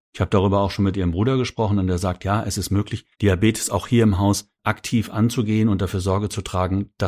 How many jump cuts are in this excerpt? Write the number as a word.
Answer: two